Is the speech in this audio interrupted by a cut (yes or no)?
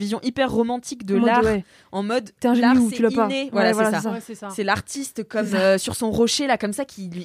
no